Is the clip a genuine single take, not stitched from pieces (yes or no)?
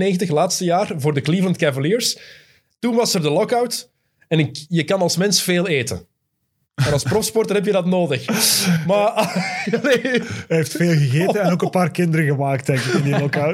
yes